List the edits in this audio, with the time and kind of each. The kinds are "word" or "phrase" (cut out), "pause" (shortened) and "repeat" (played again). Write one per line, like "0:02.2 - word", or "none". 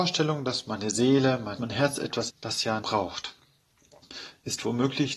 0:01.6 - word
0:02.3 - word
0:02.8 - word